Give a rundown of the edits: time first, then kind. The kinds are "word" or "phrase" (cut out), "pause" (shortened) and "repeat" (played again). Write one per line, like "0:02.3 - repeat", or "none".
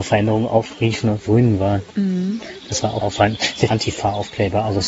0:01.3 - word
0:03.0 - word
0:03.7 - word